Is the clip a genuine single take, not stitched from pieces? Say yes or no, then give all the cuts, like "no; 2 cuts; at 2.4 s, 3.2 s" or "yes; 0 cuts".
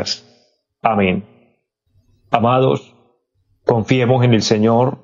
yes; 0 cuts